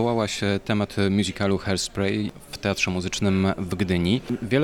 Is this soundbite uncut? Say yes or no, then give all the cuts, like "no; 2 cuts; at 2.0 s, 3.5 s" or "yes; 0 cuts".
yes; 0 cuts